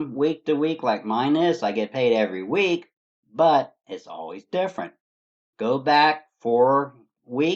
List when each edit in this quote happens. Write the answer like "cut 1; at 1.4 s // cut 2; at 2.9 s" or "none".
none

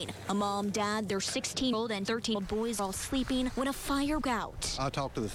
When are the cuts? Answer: cut 1; at 1.7 s // cut 2; at 2.0 s // cut 3; at 2.3 s // cut 4; at 2.8 s // cut 5; at 4.2 s

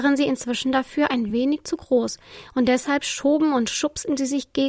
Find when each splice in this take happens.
none

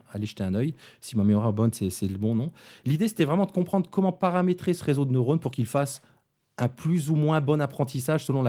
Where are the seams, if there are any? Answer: none

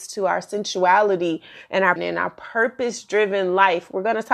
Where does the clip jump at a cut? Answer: cut 1; at 2.0 s

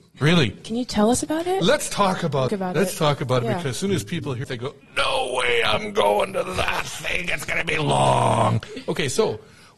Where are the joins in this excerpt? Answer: cut 1; at 2.5 s // cut 2; at 4.4 s // cut 3; at 4.8 s

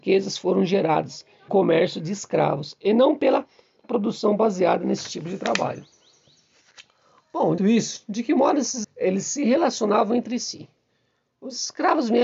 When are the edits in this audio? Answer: cut 1; at 1.5 s // cut 2; at 3.8 s // cut 3; at 7.6 s // cut 4; at 8.8 s

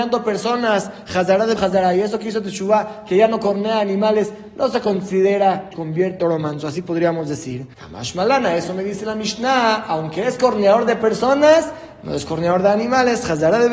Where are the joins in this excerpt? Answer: cut 1; at 1.6 s // cut 2; at 5.7 s // cut 3; at 6.2 s // cut 4; at 7.7 s

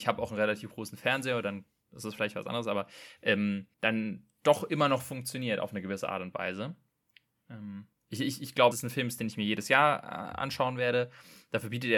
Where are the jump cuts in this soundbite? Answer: cut 1; at 3.7 s // cut 2; at 7.9 s // cut 3; at 8.7 s

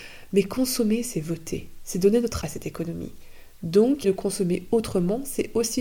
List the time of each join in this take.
cut 1; at 2.4 s // cut 2; at 4.0 s

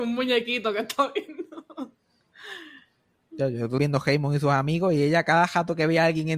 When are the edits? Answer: cut 1; at 3.8 s

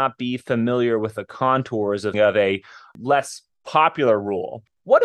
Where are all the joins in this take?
cut 1; at 2.1 s

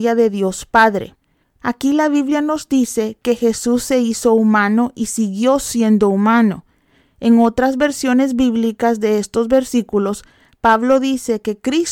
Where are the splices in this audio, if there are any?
none

